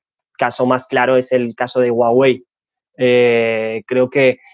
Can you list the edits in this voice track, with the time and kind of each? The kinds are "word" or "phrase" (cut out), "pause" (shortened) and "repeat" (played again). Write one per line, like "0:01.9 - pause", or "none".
none